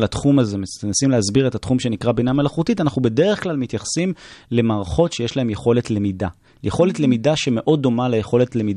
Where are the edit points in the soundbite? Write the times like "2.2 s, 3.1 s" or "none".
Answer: none

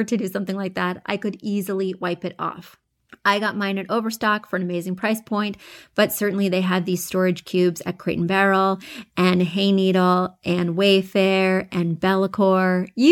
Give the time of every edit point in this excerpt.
none

